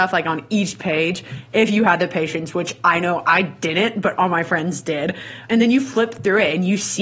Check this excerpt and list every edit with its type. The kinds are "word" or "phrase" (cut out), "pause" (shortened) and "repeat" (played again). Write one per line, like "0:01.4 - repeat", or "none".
0:05.5 - word